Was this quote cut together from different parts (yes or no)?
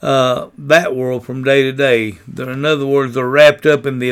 no